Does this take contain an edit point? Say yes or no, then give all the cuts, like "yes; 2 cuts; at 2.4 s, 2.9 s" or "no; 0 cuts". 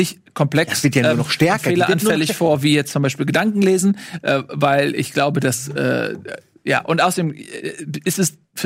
no; 0 cuts